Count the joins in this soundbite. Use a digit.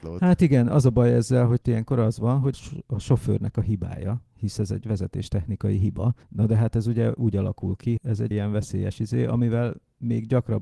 5